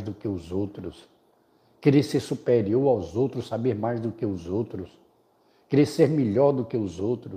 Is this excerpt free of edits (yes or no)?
yes